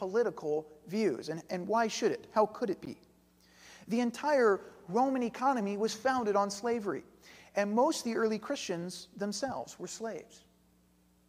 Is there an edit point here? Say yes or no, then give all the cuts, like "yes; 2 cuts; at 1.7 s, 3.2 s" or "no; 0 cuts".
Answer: no; 0 cuts